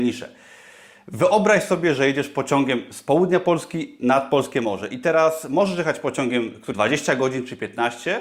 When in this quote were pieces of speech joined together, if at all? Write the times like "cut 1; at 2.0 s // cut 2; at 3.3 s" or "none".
cut 1; at 6.7 s